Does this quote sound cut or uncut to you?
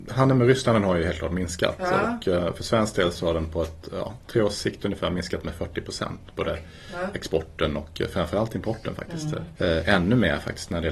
uncut